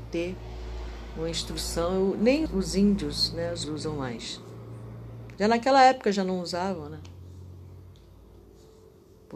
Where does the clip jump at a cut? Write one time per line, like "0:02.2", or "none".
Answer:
0:02.5
0:03.6